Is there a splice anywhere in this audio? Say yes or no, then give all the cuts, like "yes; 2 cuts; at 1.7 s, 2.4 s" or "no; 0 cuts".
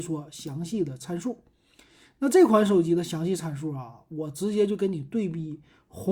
no; 0 cuts